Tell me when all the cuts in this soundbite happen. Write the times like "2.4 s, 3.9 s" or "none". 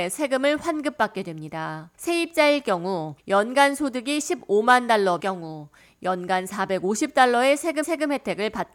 1.9 s, 3.2 s, 5.2 s, 7.8 s